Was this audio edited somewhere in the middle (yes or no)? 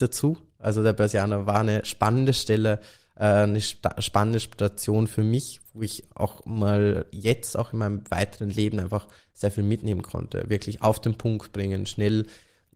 no